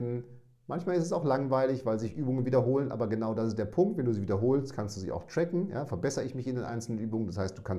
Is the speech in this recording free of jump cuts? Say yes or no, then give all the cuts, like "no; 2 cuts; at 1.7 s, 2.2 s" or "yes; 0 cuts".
yes; 0 cuts